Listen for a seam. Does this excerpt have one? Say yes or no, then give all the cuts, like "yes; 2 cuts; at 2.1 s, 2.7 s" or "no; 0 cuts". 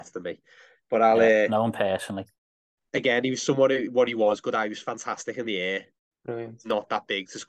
no; 0 cuts